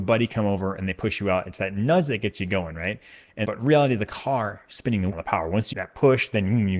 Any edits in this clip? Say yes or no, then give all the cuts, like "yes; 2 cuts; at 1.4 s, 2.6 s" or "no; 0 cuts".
yes; 3 cuts; at 3.4 s, 5.1 s, 5.7 s